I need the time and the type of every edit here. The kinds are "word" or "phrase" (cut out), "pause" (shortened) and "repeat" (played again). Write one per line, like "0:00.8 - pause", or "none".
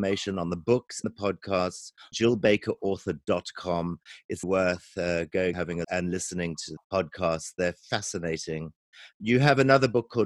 0:01.0 - word
0:02.1 - word
0:04.4 - word
0:05.5 - word
0:05.8 - word
0:06.8 - word